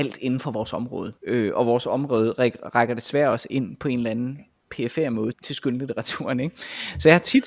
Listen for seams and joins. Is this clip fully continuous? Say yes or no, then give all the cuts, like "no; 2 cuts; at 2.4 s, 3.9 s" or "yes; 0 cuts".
no; 2 cuts; at 1.2 s, 5.3 s